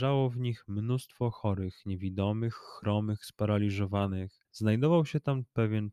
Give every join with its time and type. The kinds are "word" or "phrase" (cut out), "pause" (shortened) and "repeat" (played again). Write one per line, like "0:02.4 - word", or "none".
0:04.4 - pause